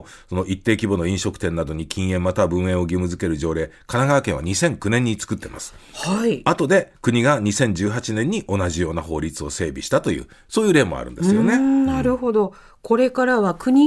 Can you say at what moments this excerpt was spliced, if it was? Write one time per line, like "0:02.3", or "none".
none